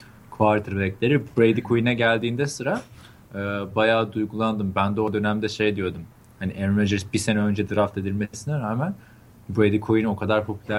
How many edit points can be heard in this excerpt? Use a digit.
0